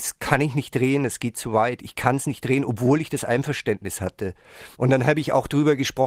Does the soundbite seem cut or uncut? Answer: cut